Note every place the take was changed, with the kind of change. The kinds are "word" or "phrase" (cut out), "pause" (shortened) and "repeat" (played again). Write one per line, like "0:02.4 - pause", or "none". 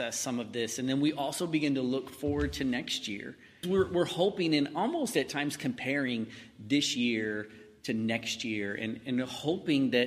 0:03.6 - word